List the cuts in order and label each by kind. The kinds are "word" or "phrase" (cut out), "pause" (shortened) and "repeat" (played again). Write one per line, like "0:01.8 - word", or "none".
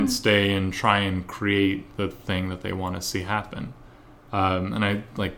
none